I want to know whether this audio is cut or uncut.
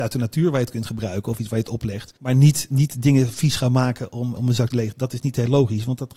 cut